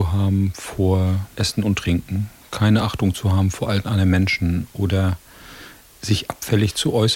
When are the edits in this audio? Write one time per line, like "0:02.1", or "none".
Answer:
none

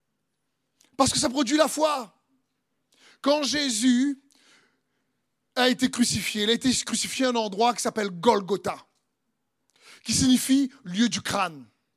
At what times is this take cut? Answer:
none

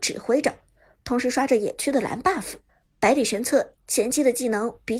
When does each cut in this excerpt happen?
0:02.7

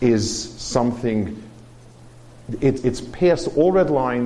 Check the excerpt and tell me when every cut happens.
0:02.8

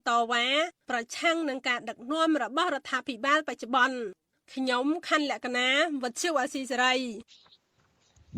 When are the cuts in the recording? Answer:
none

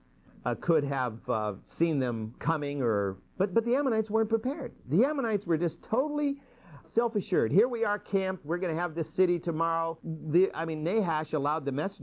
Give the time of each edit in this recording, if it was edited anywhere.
0:03.3
0:06.8
0:10.0

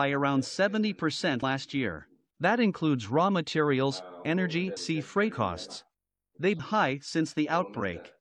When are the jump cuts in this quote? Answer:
0:01.4
0:04.8
0:05.3
0:06.6

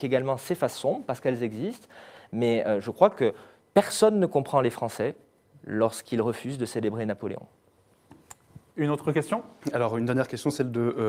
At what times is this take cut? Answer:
none

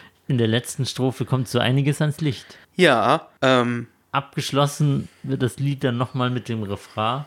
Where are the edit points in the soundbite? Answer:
0:02.6

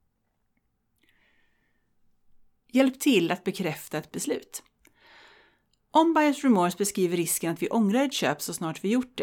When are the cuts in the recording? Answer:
0:04.1

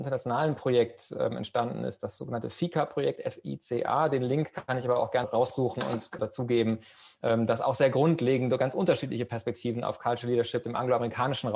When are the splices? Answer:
0:05.2
0:06.2
0:10.6

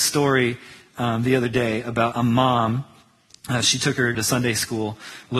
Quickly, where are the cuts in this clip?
0:02.1
0:04.1

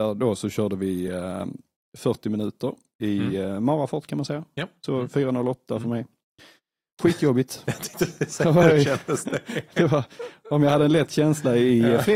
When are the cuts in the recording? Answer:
none

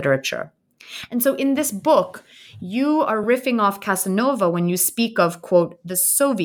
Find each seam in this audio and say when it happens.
none

